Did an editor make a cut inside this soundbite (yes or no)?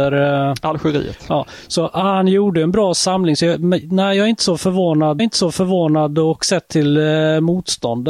yes